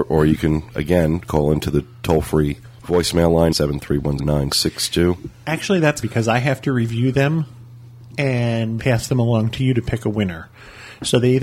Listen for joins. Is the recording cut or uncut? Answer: cut